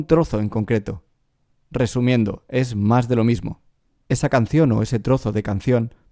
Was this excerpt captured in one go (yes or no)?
yes